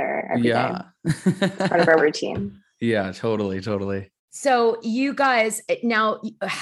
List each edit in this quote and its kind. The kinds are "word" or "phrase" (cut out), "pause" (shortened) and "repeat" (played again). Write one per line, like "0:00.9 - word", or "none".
0:02.0 - word
0:04.2 - pause